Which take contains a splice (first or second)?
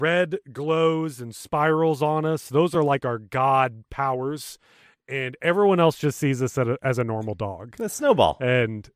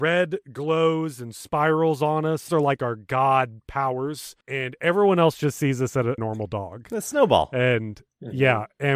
second